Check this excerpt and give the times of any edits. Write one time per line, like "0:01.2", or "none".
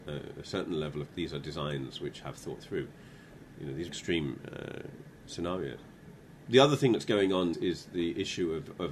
0:01.1
0:03.9
0:07.5